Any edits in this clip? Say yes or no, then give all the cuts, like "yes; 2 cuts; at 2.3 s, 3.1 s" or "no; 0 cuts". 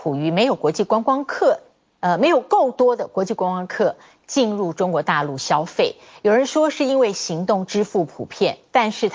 no; 0 cuts